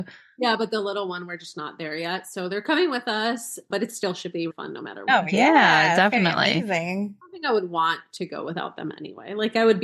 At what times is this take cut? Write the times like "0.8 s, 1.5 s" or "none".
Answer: 4.5 s